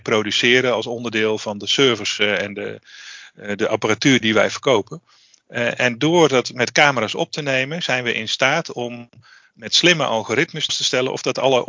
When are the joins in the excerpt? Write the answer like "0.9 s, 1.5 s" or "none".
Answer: 10.7 s